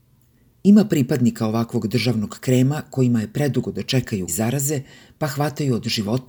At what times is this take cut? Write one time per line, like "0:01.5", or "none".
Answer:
0:04.3